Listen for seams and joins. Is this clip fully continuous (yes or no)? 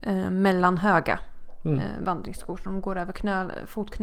yes